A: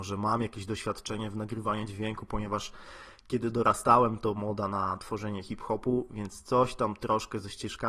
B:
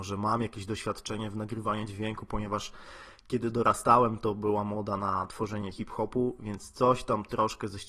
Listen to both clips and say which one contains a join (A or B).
A